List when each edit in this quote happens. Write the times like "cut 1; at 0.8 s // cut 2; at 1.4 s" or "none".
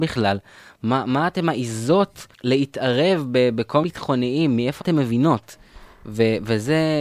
cut 1; at 2.3 s // cut 2; at 3.8 s // cut 3; at 4.8 s